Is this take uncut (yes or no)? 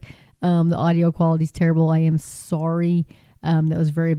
yes